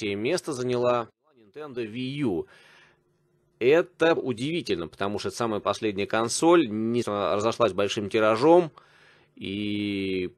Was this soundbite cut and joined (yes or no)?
yes